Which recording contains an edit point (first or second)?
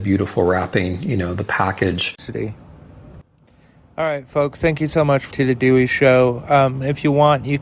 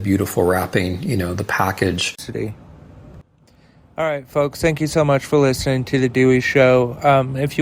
first